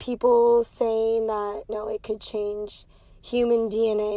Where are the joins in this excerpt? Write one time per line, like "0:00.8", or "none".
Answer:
0:01.7